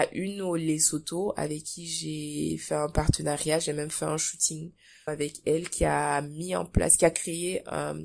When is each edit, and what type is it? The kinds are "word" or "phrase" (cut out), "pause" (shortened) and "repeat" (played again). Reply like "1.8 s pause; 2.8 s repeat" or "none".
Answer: 5.1 s word